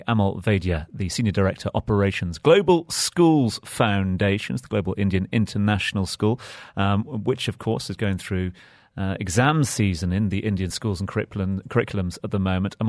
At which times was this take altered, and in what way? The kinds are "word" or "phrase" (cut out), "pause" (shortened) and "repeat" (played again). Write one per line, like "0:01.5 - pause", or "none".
none